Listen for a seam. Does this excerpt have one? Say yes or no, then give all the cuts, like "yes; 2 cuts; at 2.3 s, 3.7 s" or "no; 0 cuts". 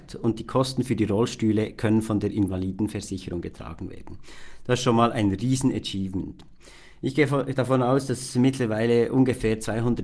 no; 0 cuts